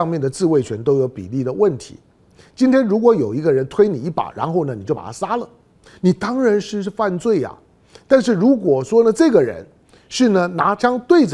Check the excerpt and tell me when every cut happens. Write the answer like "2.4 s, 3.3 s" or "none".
none